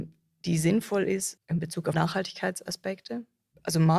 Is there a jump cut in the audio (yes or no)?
yes